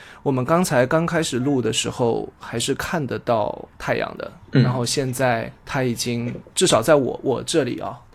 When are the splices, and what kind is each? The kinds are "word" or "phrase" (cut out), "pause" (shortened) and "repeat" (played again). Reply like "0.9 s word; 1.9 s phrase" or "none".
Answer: 3.8 s pause; 5.6 s pause